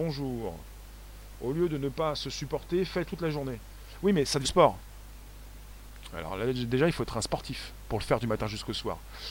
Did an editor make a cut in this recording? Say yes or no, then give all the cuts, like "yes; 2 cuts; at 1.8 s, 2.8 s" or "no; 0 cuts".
yes; 3 cuts; at 3.1 s, 4.4 s, 7.8 s